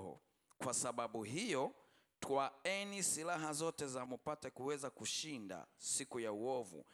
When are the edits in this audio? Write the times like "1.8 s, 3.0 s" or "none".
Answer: 4.1 s